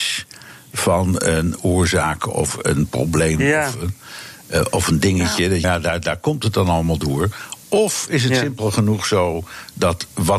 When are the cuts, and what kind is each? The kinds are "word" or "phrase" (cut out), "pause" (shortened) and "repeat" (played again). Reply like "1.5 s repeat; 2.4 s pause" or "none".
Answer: 5.6 s phrase